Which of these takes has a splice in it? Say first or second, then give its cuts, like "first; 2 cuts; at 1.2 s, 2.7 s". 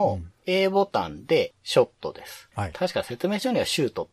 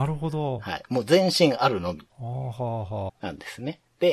second; 1 cut; at 3.1 s